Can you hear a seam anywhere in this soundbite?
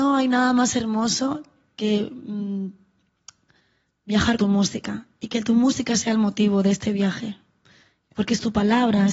yes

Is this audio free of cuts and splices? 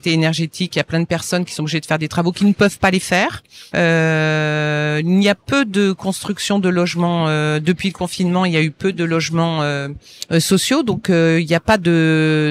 yes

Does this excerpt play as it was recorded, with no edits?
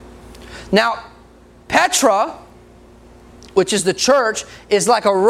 yes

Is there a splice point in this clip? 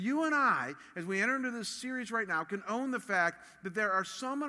no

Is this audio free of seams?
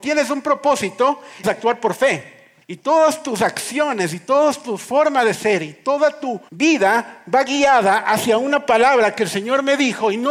no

